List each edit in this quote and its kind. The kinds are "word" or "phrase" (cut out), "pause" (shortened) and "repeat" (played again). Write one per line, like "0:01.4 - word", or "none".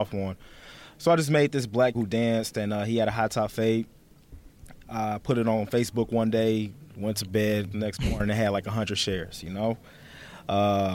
0:01.9 - word
0:07.7 - phrase